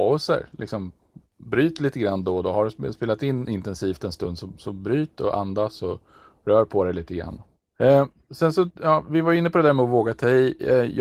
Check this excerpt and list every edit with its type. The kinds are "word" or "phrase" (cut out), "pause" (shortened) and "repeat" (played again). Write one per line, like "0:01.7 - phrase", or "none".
none